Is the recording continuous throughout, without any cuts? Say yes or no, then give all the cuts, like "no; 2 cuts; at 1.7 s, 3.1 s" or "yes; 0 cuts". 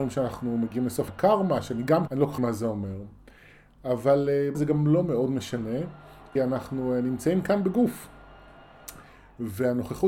no; 5 cuts; at 1.1 s, 2.1 s, 2.4 s, 4.5 s, 6.4 s